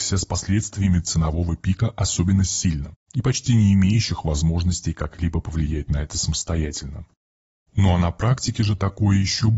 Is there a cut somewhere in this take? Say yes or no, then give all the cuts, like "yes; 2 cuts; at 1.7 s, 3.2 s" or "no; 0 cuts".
no; 0 cuts